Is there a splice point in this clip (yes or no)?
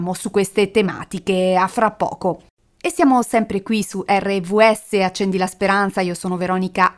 no